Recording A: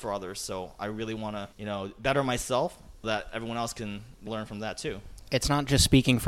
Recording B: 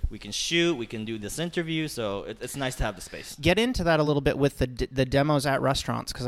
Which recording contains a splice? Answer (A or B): A